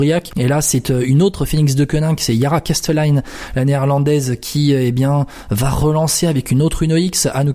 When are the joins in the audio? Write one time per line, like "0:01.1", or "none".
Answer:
none